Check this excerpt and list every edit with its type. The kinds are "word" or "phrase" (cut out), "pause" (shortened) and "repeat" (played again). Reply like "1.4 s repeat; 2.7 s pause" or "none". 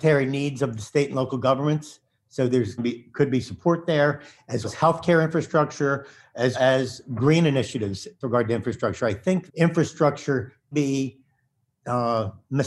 2.8 s word; 4.6 s word; 6.5 s word; 8.2 s word; 9.5 s word; 10.7 s word